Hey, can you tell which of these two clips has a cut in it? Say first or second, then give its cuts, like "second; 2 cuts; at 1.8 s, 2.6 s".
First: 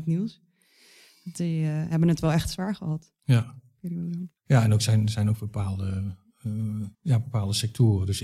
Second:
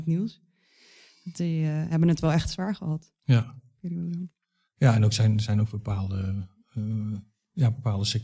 first; 2 cuts; at 4.4 s, 6.9 s